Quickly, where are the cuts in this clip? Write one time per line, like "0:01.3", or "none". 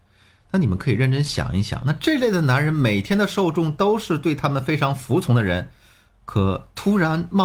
none